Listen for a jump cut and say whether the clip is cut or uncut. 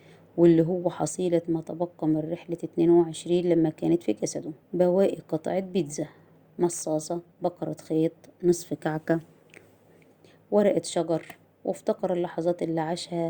cut